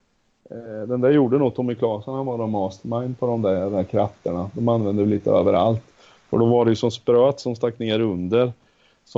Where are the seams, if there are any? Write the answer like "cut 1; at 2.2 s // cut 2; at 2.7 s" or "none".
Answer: none